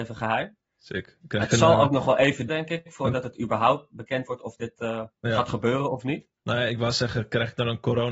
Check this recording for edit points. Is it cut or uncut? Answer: cut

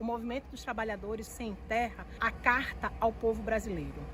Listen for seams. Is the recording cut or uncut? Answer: cut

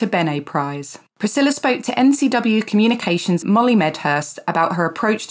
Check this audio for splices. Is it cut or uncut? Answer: cut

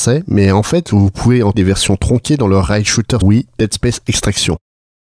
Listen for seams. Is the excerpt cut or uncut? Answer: cut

